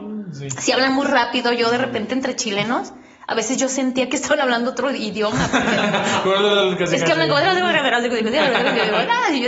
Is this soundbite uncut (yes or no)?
yes